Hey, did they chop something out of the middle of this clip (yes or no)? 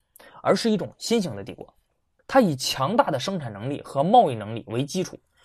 no